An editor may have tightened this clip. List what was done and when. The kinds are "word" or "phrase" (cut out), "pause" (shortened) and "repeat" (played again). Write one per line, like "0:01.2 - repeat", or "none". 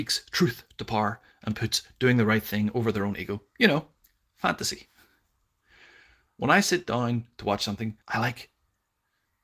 0:08.0 - pause